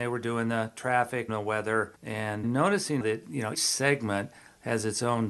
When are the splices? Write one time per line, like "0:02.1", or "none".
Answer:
0:01.3
0:02.4
0:03.0
0:03.5